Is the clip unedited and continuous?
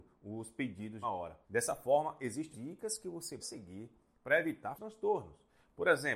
no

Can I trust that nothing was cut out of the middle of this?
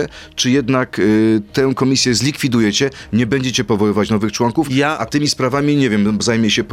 yes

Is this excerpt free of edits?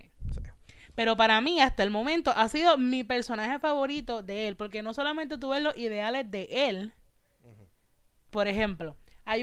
yes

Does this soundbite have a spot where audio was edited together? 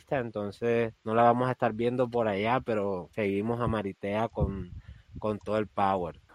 yes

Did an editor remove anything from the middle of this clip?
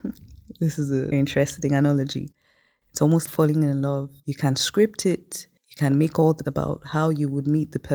yes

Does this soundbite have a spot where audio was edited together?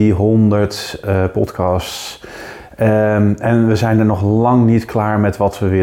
no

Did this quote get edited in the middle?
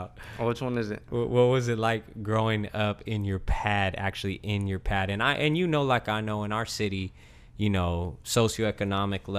no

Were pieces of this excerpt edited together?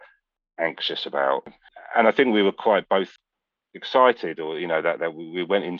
no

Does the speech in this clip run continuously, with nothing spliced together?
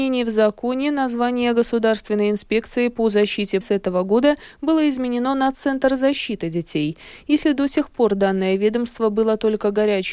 no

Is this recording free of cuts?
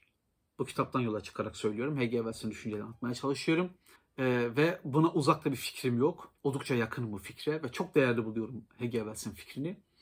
no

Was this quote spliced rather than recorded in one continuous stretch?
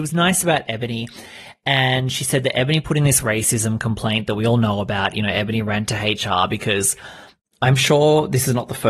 no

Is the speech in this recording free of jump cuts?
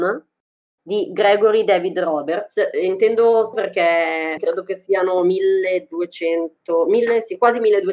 no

